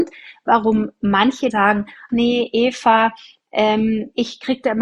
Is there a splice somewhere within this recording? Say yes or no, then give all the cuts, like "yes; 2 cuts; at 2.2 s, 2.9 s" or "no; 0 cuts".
yes; 2 cuts; at 1.5 s, 2.1 s